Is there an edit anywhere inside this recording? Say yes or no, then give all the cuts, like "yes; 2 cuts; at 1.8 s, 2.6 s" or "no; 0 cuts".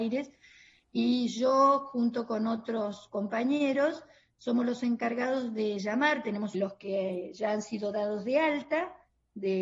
yes; 1 cut; at 6.5 s